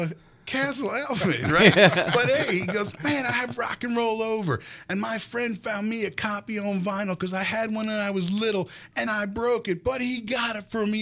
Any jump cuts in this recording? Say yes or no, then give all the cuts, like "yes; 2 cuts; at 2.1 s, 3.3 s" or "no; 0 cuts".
yes; 1 cut; at 9.1 s